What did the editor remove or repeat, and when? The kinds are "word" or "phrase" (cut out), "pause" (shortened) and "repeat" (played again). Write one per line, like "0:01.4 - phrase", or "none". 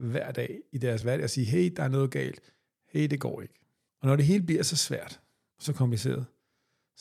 none